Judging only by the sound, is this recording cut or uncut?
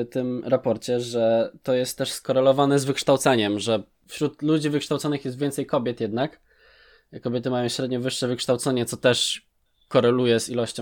uncut